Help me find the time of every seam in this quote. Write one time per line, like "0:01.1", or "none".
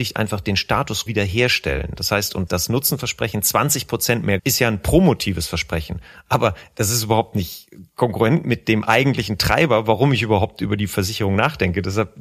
0:01.1
0:02.5
0:04.4